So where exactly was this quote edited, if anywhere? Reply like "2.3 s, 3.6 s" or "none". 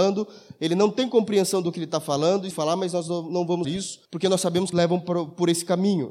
2.5 s, 3.6 s, 4.0 s, 4.7 s